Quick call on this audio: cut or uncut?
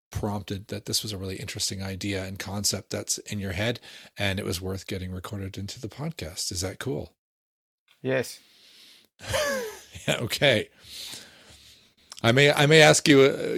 uncut